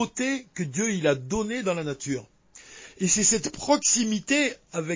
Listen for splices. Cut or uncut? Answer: uncut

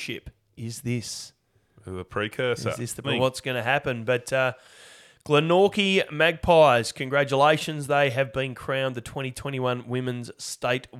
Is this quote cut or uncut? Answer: cut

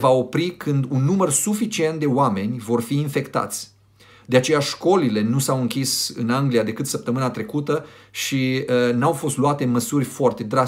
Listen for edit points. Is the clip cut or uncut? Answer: uncut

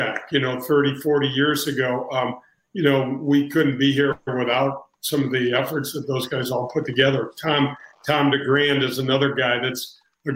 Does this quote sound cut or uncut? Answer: uncut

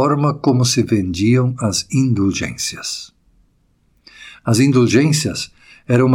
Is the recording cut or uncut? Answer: uncut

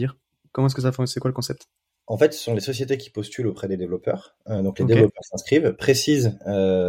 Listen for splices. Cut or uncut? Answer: uncut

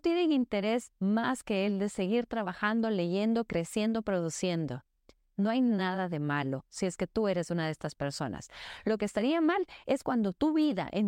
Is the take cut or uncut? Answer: uncut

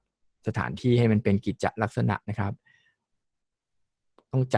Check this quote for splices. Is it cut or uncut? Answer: uncut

